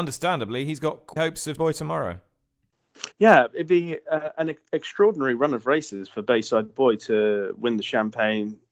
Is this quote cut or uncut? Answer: cut